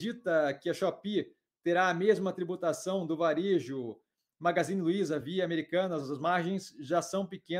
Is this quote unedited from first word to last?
yes; 0 cuts

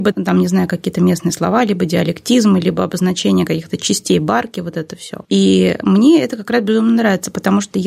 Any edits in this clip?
yes; 1 cut; at 5.2 s

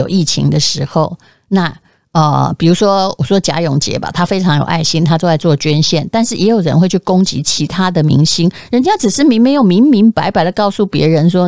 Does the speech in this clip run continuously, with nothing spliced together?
yes; 0 cuts

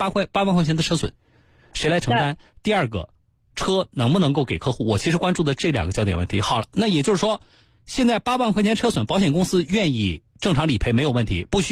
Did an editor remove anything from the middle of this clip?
no; 0 cuts

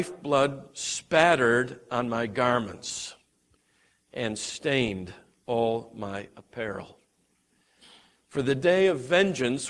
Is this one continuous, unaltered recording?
yes; 0 cuts

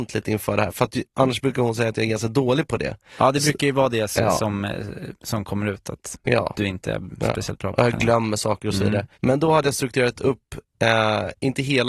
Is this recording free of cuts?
no; 3 cuts; at 5.1 s, 6.2 s, 9.1 s

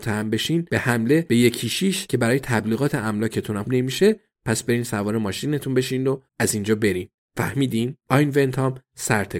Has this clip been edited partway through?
yes; 3 cuts; at 3.7 s, 6.3 s, 8.0 s

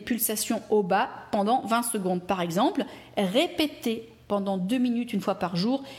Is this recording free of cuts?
yes; 0 cuts

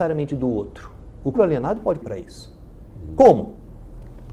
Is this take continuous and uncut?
no; 2 cuts; at 1.3 s, 2.0 s

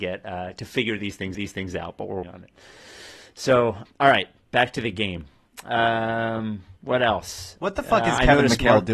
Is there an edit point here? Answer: yes; 4 cuts; at 1.3 s, 2.2 s, 3.9 s, 6.8 s

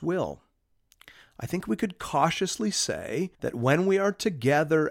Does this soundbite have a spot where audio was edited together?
yes; 1 cut; at 3.3 s

